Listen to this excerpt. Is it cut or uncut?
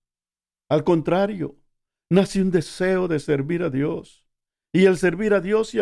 uncut